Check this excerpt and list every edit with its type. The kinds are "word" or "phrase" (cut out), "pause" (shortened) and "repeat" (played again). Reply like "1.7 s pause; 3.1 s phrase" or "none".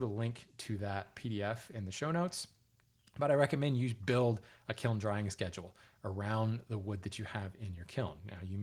none